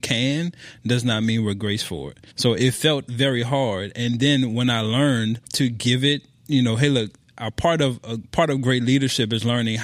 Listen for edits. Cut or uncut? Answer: cut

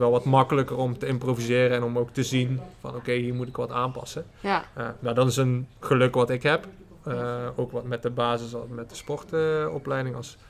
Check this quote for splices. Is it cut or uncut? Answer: uncut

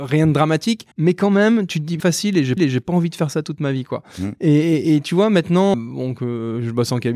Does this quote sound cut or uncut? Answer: cut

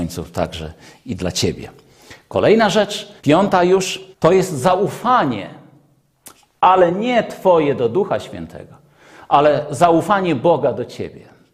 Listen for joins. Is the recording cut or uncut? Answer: cut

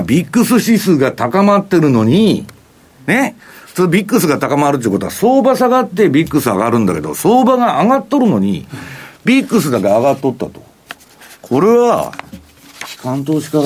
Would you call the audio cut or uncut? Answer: uncut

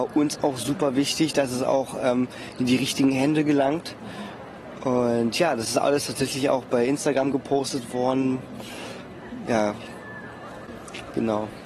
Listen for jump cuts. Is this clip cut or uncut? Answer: uncut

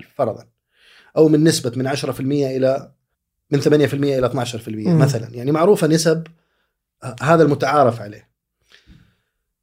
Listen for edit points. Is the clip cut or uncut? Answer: cut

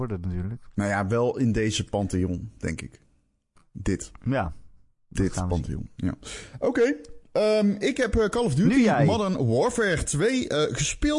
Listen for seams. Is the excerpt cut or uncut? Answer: uncut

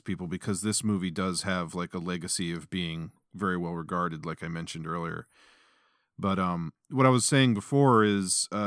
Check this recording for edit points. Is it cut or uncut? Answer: uncut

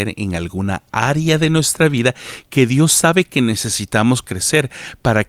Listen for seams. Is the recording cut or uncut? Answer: uncut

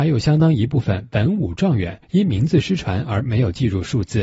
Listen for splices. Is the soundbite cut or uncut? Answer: cut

